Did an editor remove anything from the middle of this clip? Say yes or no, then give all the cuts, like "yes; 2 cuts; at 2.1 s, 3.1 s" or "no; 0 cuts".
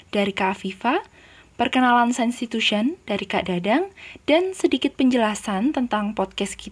no; 0 cuts